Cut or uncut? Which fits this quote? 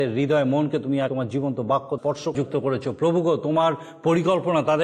cut